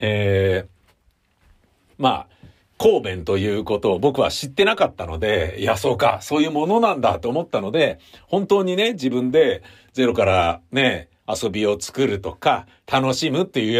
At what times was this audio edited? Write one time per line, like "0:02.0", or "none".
none

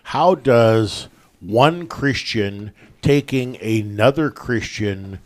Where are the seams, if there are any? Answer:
none

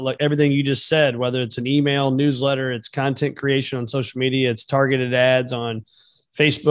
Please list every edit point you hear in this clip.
none

